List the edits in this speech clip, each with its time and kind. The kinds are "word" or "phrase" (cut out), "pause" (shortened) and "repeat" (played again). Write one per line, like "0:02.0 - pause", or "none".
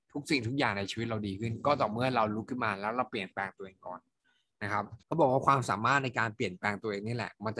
0:05.0 - pause